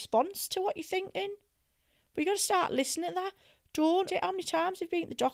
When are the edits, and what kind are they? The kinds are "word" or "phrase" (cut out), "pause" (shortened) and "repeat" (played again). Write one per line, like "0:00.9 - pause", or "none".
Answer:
0:04.1 - word